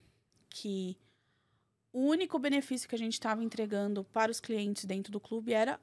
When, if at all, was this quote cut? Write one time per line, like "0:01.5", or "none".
none

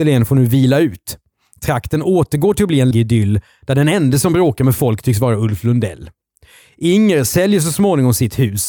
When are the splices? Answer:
0:02.9

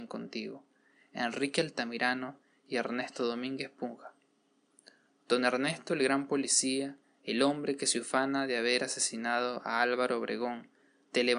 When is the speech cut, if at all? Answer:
none

